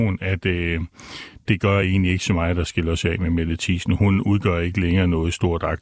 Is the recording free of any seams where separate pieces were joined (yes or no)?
yes